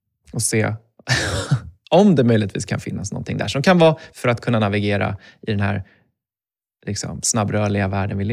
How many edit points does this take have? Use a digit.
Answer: 1